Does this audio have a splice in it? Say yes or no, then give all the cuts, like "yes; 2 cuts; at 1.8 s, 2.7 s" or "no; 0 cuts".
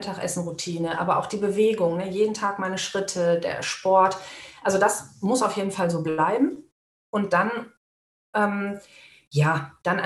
no; 0 cuts